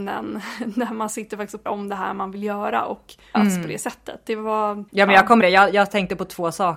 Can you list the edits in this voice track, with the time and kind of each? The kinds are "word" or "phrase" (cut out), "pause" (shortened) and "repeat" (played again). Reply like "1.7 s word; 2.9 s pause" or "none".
1.7 s word; 3.3 s word; 4.9 s pause; 5.4 s word